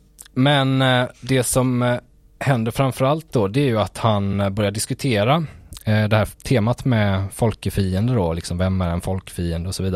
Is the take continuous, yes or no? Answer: yes